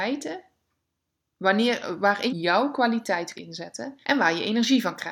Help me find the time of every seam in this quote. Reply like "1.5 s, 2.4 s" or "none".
2.3 s, 3.4 s, 4.0 s